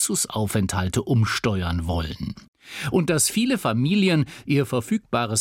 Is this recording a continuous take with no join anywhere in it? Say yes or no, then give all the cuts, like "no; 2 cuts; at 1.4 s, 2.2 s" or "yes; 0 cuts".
yes; 0 cuts